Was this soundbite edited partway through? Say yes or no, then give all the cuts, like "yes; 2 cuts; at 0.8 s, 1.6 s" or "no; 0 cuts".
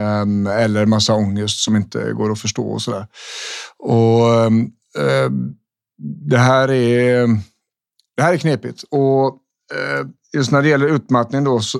no; 0 cuts